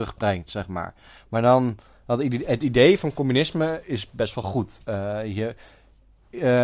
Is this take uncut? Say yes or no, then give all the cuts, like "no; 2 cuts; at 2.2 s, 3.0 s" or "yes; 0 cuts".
yes; 0 cuts